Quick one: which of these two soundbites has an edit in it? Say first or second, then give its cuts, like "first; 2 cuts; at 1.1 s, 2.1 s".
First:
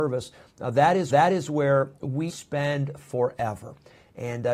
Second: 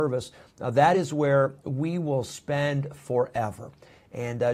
first; 2 cuts; at 1.1 s, 2.3 s